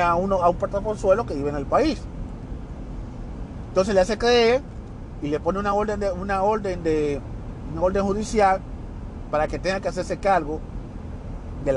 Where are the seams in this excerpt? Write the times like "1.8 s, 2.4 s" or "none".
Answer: none